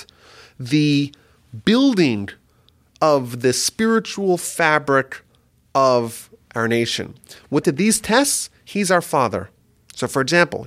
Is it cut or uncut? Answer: cut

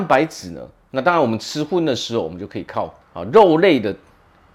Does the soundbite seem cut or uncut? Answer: cut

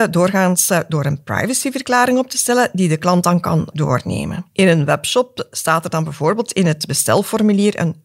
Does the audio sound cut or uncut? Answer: cut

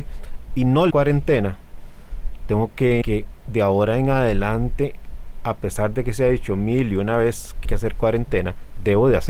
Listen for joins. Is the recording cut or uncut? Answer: cut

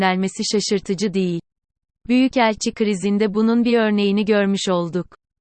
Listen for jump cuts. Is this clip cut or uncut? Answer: uncut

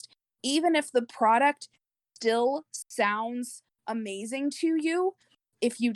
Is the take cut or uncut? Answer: uncut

